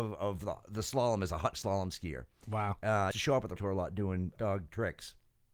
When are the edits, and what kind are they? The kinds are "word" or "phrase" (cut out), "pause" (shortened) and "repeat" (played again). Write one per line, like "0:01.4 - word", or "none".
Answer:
0:01.5 - word
0:03.1 - word
0:03.6 - word
0:04.4 - word

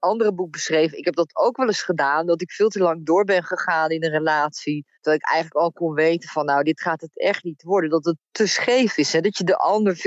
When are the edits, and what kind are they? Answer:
0:04.9 - pause

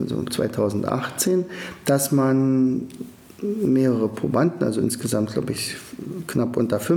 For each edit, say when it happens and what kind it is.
none

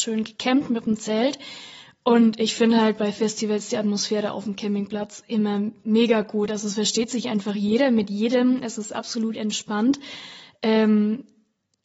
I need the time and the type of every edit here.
none

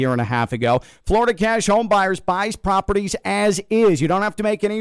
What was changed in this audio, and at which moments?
none

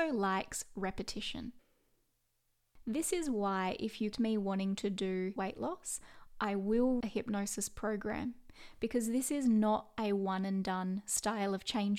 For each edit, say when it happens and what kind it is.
0:04.1 - word
0:05.4 - phrase
0:07.0 - word

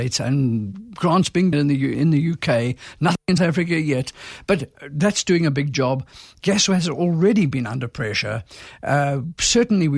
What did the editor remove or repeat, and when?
0:01.5 - phrase
0:01.9 - word
0:03.4 - word

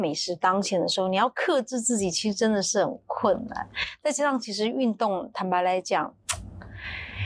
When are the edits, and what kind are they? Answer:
none

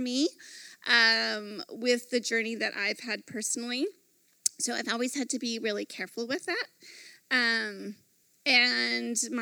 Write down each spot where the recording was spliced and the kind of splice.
none

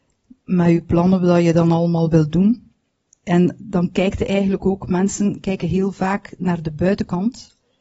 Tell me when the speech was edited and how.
none

